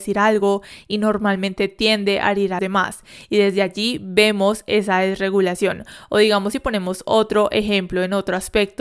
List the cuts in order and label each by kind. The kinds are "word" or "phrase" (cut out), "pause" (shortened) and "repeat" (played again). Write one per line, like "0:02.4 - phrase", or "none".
0:02.6 - word